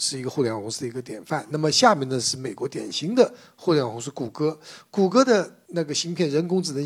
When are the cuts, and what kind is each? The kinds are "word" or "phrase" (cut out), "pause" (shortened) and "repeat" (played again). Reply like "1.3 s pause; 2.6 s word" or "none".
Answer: none